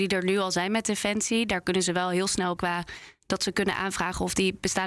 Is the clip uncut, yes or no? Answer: no